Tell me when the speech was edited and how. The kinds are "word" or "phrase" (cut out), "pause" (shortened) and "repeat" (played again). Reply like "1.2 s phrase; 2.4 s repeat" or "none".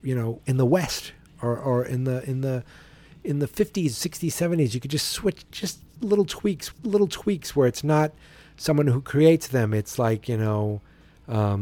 6.7 s repeat

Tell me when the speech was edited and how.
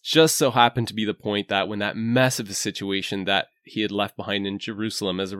none

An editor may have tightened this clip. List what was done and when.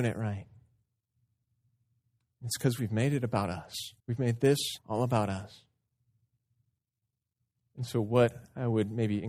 4.0 s pause; 4.8 s pause

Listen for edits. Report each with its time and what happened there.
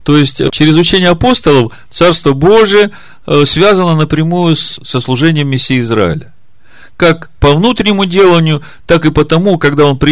none

